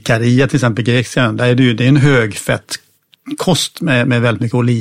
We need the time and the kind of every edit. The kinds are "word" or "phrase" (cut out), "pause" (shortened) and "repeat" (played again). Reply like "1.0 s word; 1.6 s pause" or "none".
none